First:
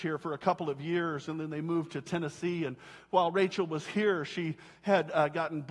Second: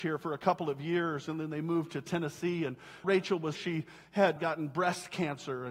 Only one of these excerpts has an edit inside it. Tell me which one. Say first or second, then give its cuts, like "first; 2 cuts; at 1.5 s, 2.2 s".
second; 3 cuts; at 3.0 s, 3.6 s, 4.4 s